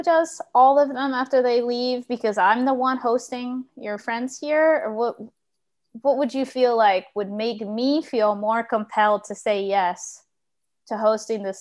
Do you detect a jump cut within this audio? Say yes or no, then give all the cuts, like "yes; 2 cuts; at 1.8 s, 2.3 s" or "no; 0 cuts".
no; 0 cuts